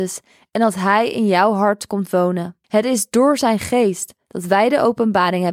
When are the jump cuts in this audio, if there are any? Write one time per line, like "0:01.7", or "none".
0:02.6